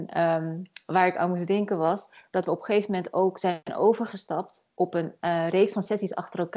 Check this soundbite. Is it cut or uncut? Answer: uncut